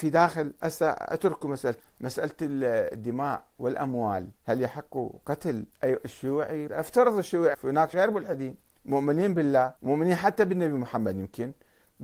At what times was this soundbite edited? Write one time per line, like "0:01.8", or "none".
0:01.8
0:04.4
0:05.7
0:06.7
0:07.5
0:07.9
0:08.7
0:09.8